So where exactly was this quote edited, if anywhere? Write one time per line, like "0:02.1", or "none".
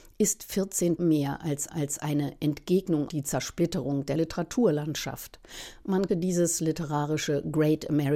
0:01.0
0:01.7
0:03.1
0:04.2
0:06.1